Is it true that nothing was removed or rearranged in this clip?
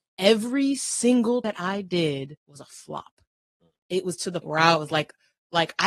no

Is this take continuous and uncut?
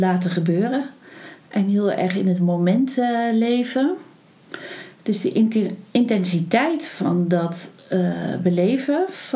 yes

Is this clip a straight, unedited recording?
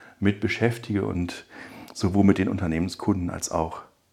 yes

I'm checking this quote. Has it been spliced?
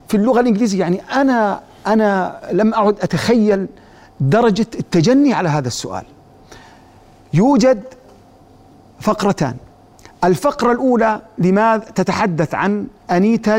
no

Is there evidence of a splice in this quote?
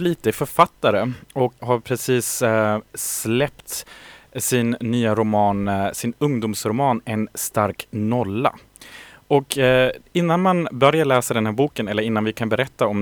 yes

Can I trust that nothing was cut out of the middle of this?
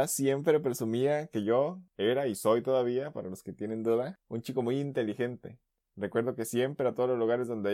yes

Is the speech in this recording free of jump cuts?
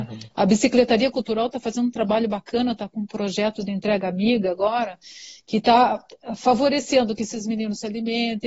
yes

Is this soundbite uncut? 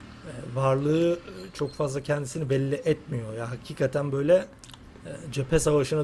yes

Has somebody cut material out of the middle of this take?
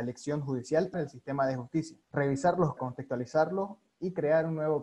yes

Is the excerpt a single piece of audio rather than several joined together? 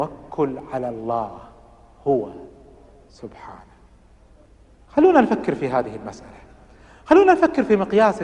yes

